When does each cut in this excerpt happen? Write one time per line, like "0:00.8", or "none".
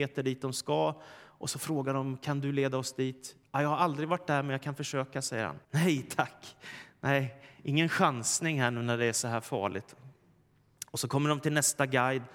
0:05.6